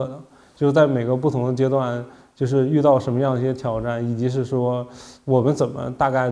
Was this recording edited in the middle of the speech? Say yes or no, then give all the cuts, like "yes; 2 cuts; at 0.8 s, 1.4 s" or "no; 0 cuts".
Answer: no; 0 cuts